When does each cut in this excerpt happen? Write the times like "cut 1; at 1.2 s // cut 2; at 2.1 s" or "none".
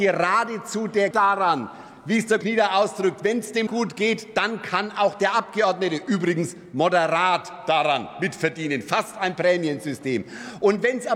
cut 1; at 1.1 s // cut 2; at 2.4 s // cut 3; at 3.7 s